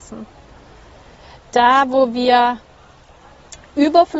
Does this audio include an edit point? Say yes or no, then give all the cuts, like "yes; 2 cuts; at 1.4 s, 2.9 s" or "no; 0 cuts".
no; 0 cuts